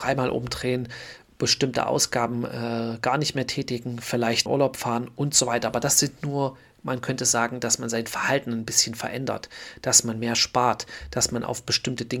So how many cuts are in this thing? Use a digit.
1